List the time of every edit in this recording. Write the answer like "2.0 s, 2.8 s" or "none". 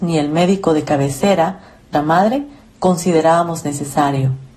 1.9 s